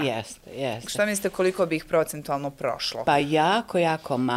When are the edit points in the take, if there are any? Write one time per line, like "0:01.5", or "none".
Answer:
none

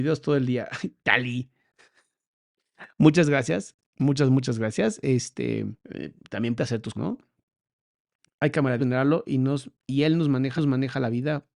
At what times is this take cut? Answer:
0:03.8
0:05.8
0:06.6
0:06.9
0:08.8
0:09.8
0:10.6

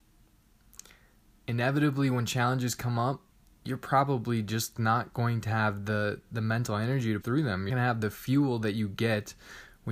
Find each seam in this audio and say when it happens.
0:03.3
0:07.2
0:07.7

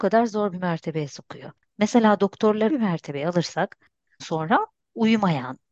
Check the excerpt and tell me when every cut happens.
0:02.7
0:04.2

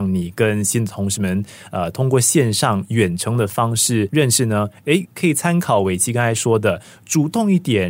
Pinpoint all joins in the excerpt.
none

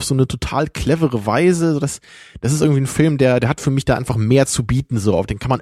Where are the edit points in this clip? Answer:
none

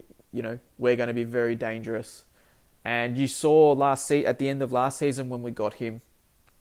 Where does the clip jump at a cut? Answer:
none

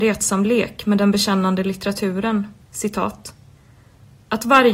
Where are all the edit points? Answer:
0:02.6

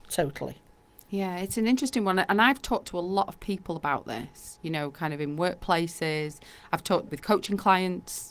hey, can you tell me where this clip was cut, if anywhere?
0:07.1

